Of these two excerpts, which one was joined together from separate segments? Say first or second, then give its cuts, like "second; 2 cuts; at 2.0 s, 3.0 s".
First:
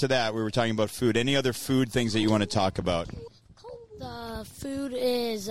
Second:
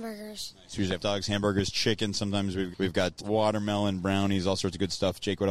second; 2 cuts; at 1.0 s, 2.7 s